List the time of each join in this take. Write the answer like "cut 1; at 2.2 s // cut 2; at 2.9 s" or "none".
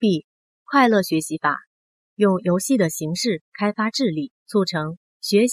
cut 1; at 4.4 s